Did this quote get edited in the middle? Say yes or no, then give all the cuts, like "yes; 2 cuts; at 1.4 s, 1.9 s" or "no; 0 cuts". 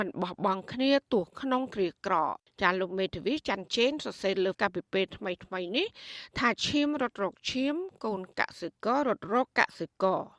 yes; 2 cuts; at 2.4 s, 4.5 s